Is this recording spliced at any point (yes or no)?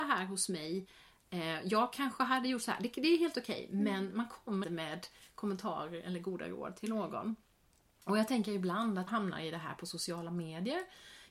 yes